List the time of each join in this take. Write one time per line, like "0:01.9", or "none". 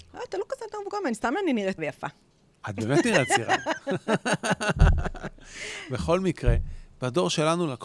0:01.8

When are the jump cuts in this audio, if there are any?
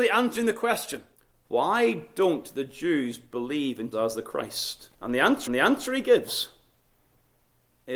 0:01.1
0:03.9
0:04.9
0:05.5

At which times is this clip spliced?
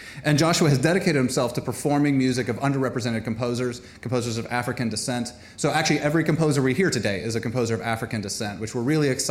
none

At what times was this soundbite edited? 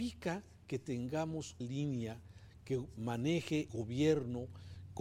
0:01.6
0:03.7

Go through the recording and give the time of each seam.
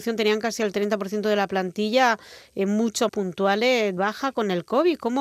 0:03.1
0:04.0

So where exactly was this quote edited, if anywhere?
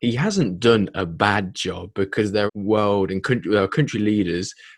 0:02.5

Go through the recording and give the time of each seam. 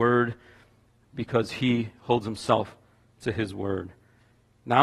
none

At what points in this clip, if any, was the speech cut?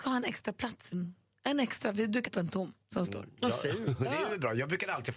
0:00.9
0:02.3
0:02.8

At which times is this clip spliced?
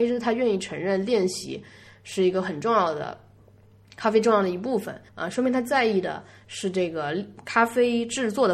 0:05.1

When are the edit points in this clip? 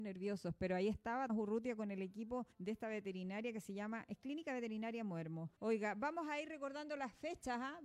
0:01.3
0:02.5
0:05.6

